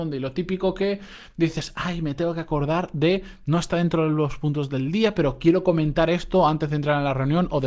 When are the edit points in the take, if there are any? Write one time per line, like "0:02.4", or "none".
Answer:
none